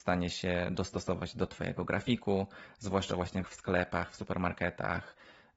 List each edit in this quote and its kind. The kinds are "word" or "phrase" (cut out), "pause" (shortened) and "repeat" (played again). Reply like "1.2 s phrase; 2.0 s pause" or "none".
3.4 s word